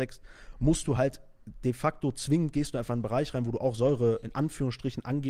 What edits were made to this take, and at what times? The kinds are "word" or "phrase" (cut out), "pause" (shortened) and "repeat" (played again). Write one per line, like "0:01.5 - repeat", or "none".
none